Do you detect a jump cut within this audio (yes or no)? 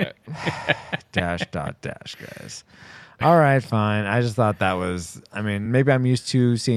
no